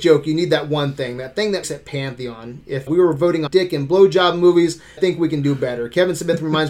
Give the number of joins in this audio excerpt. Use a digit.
4